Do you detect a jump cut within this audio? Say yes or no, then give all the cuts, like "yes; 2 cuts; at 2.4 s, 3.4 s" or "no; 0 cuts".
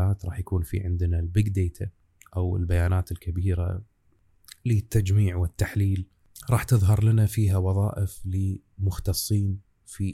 no; 0 cuts